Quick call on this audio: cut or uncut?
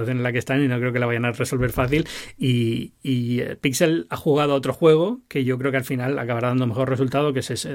uncut